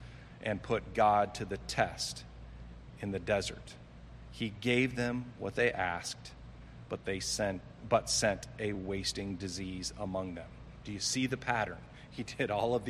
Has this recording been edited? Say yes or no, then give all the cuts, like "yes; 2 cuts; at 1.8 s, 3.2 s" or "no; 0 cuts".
no; 0 cuts